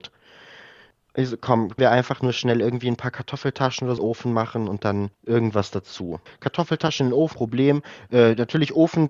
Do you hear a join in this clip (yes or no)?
yes